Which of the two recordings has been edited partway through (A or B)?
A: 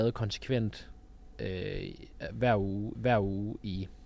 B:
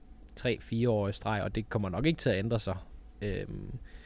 A